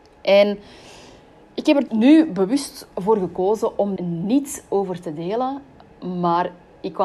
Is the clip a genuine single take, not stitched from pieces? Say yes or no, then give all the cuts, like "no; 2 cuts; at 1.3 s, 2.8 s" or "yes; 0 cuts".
no; 3 cuts; at 1.9 s, 2.9 s, 4.0 s